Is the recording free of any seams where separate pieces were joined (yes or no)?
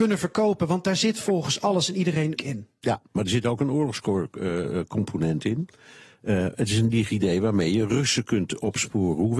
no